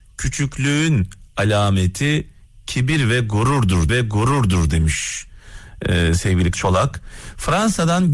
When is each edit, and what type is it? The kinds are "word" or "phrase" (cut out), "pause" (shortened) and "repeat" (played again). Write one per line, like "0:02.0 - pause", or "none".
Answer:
0:03.9 - repeat
0:06.5 - phrase